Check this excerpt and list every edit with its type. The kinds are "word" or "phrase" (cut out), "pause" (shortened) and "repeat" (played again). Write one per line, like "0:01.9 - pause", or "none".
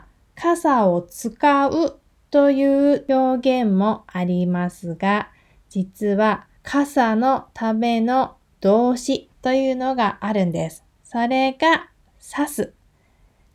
0:06.6 - pause